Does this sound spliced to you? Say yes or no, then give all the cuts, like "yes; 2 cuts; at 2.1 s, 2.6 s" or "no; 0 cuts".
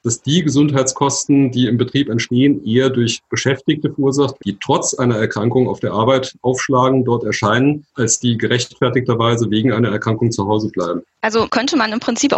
yes; 2 cuts; at 4.4 s, 8.2 s